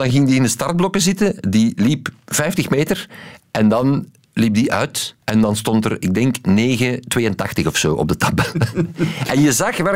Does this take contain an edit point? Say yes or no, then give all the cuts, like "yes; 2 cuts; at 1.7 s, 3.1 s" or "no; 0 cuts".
yes; 1 cut; at 5.2 s